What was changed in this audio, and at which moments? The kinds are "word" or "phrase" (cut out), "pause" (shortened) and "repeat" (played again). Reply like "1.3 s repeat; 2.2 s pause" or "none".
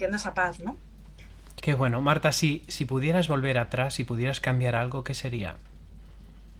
1.6 s word